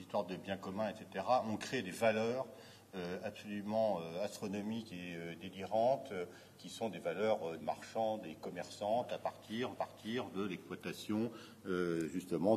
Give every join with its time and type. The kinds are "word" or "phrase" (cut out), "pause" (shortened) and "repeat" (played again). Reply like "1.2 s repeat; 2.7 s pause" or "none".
7.6 s word; 9.8 s repeat